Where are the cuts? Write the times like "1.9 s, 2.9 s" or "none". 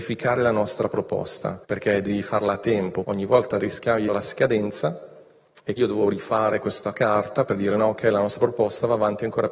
1.6 s, 3.0 s, 4.1 s, 5.8 s